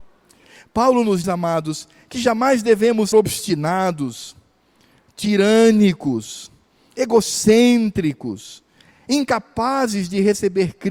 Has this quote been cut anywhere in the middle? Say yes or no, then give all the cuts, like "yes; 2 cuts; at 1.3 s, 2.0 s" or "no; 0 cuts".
yes; 2 cuts; at 1.2 s, 3.1 s